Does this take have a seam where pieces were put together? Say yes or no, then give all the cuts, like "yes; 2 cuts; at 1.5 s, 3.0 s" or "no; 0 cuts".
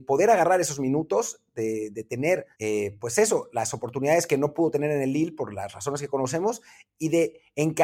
yes; 1 cut; at 2.5 s